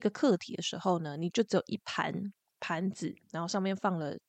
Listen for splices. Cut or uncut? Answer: uncut